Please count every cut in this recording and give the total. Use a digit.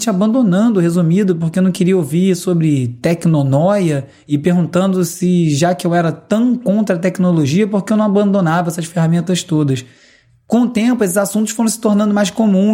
0